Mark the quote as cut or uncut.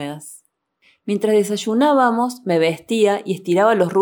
uncut